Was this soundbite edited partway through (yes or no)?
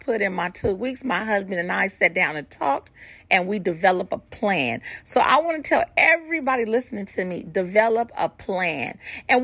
no